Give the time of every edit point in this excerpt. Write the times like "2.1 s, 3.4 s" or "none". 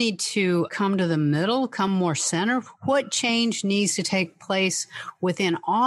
none

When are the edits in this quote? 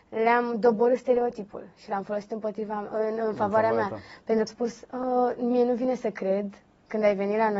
4.5 s

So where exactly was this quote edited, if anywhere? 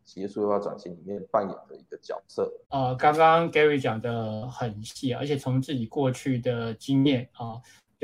2.6 s

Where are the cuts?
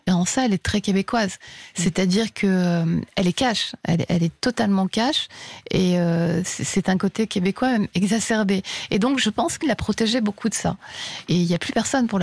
9.6 s

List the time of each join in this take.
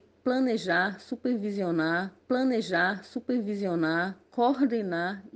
2.2 s

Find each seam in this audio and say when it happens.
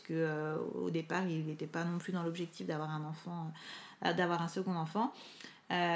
none

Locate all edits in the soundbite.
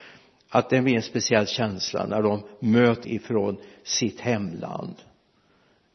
3.0 s

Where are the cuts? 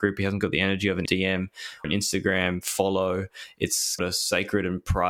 1.1 s, 1.8 s, 4.0 s

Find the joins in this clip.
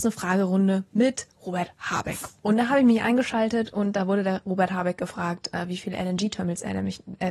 none

